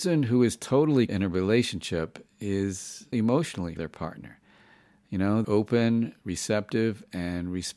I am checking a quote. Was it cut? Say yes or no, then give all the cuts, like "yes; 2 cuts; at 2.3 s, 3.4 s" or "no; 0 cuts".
yes; 4 cuts; at 1.1 s, 3.1 s, 3.8 s, 5.4 s